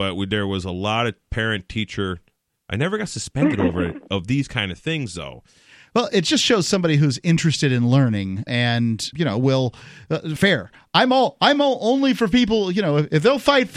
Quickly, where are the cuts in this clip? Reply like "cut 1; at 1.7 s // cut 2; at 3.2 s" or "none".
cut 1; at 4.1 s // cut 2; at 8.5 s // cut 3; at 9.1 s // cut 4; at 10.4 s